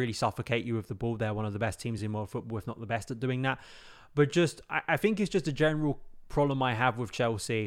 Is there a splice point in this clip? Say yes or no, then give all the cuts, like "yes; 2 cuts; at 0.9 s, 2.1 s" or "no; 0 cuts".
no; 0 cuts